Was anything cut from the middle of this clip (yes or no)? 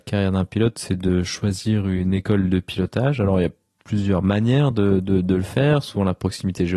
no